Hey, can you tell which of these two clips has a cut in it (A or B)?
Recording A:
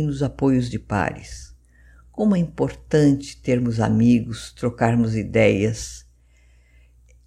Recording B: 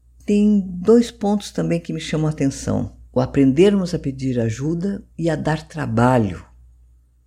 B